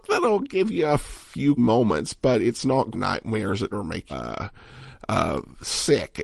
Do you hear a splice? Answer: yes; 4 cuts; at 1.6 s, 2.9 s, 3.7 s, 4.1 s

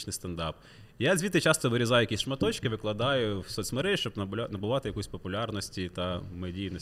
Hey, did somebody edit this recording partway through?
no; 0 cuts

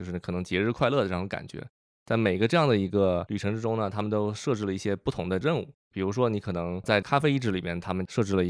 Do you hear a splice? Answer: no; 0 cuts

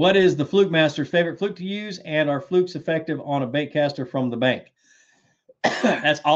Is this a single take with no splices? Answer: yes; 0 cuts

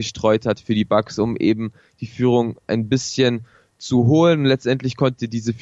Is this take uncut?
yes; 0 cuts

